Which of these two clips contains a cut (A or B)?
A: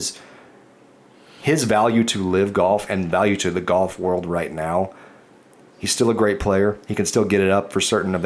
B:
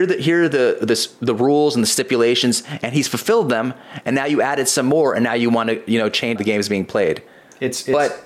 B